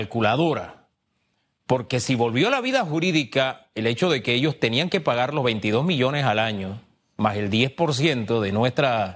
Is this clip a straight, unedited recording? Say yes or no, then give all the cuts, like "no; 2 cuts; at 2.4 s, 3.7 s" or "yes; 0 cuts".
yes; 0 cuts